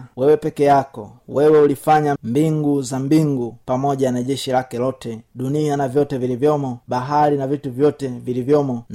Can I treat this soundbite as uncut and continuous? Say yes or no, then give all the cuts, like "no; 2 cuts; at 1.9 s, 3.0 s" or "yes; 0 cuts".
no; 1 cut; at 2.2 s